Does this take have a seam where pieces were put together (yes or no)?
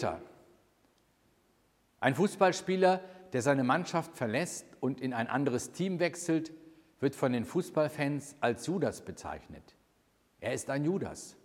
no